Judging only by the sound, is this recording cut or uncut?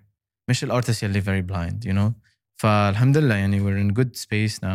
uncut